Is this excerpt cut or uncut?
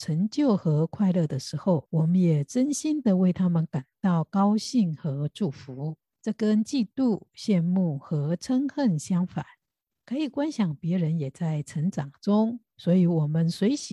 uncut